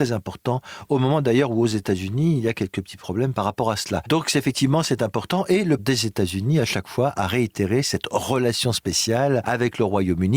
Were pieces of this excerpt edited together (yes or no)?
yes